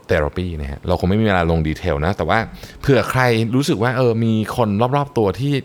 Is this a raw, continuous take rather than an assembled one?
yes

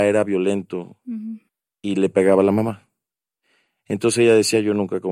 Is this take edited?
no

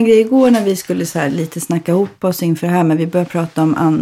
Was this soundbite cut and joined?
no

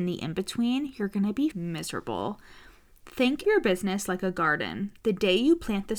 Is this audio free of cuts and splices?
no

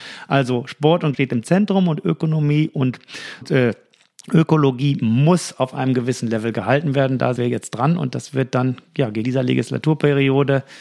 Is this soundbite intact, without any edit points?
no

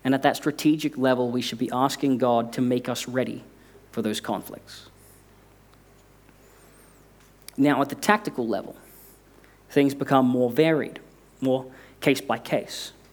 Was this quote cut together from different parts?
no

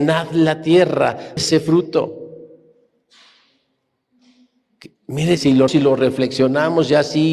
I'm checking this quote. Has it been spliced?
yes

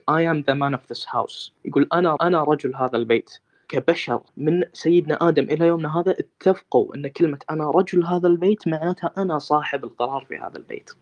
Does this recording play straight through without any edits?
no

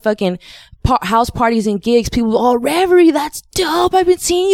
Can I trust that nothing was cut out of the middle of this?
yes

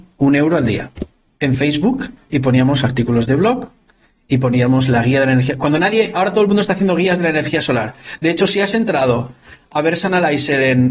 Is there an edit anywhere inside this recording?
no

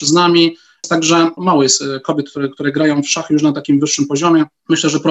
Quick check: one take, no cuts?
yes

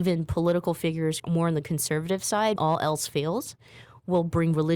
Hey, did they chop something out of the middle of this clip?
yes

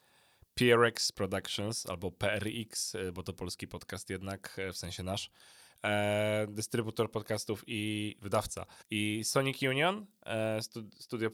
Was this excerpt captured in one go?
no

